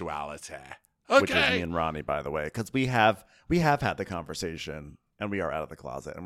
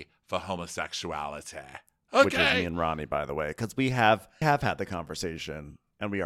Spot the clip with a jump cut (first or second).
second